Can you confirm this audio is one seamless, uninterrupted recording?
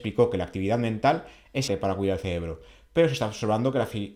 no; 1 cut; at 1.7 s

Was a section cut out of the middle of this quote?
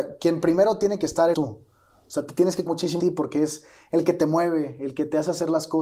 yes; 3 cuts; at 1.3 s, 2.7 s, 3.0 s

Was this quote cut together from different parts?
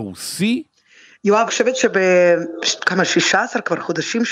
yes; 1 cut; at 1.5 s

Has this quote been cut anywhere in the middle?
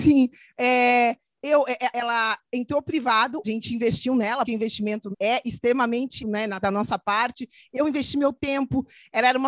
yes; 6 cuts; at 1.9 s, 3.4 s, 4.4 s, 5.1 s, 6.2 s, 6.6 s

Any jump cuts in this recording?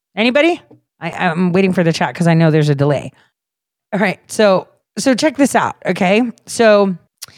no; 0 cuts

